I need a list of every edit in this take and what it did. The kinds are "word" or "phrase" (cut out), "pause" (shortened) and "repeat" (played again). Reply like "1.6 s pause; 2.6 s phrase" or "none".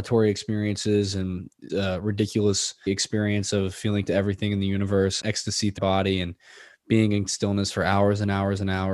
1.7 s word; 2.9 s word; 4.1 s word; 5.2 s word; 5.8 s word; 7.3 s word